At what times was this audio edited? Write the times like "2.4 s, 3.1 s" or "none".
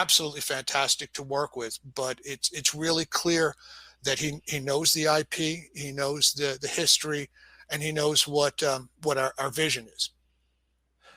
none